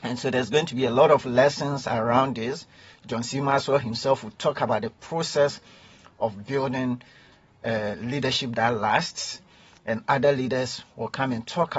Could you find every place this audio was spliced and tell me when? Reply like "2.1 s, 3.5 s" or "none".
none